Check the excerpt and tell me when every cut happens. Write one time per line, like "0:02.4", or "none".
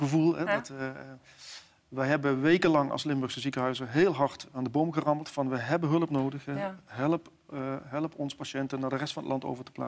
none